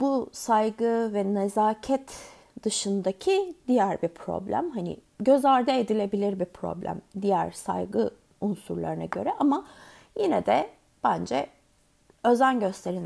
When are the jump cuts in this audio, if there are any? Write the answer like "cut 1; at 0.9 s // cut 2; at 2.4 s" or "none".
none